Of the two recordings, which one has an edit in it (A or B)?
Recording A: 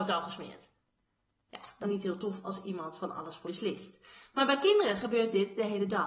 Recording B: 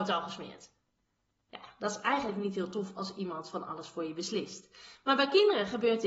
A